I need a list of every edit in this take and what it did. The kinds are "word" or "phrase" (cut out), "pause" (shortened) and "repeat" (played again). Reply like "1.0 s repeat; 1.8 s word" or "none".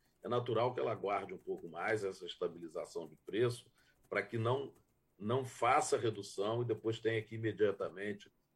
none